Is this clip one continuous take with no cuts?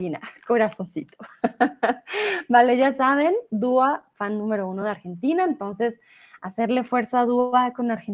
yes; 0 cuts

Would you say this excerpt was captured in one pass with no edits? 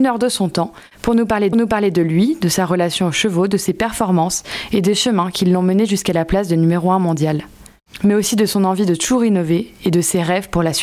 no; 1 cut; at 1.5 s

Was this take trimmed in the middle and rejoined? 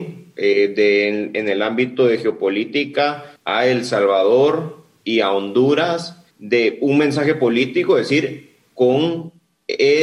yes; 2 cuts; at 3.4 s, 6.3 s

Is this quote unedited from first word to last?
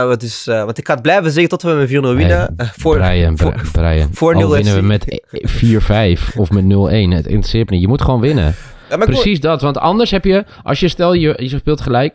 yes; 0 cuts

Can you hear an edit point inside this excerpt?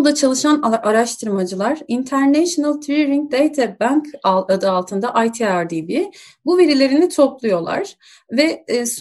no; 0 cuts

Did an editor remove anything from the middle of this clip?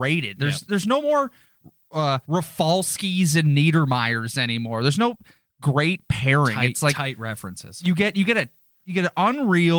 yes; 1 cut; at 2.2 s

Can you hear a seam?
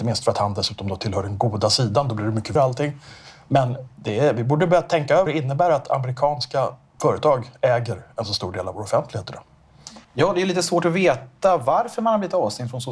yes; 4 cuts; at 2.6 s, 5.3 s, 6.8 s, 10.0 s

